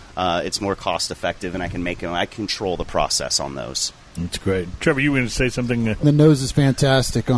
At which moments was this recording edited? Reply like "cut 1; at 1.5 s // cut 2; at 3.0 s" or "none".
cut 1; at 6.0 s